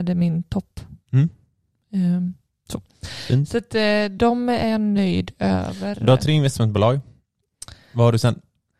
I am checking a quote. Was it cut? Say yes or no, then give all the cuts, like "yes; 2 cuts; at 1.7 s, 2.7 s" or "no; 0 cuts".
no; 0 cuts